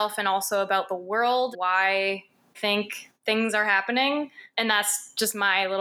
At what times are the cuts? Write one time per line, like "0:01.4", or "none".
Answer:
0:01.5
0:02.5